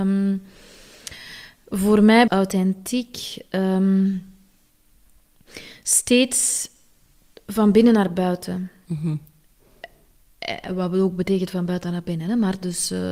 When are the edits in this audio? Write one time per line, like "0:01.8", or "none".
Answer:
0:02.3